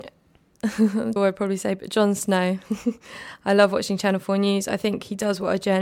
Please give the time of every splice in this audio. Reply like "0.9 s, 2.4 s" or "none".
1.2 s